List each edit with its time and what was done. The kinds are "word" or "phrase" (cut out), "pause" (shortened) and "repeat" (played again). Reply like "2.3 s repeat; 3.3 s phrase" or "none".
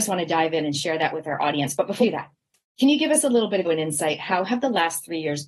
2.0 s word; 3.6 s word

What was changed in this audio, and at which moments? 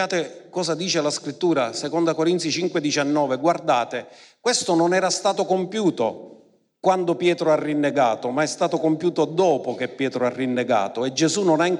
none

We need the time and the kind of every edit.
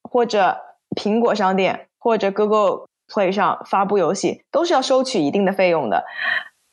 none

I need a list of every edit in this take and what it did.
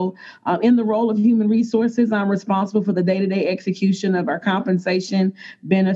none

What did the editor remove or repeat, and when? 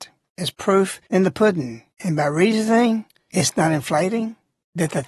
1.9 s pause

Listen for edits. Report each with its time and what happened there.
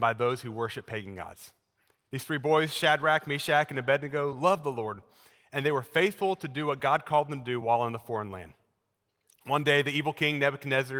none

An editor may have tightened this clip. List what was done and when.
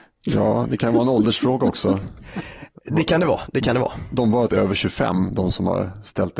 4.5 s word

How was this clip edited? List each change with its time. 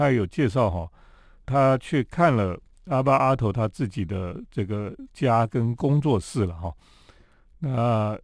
1.4 s word

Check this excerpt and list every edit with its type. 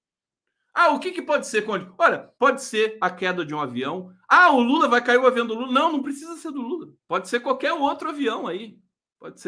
2.3 s pause; 7.0 s pause

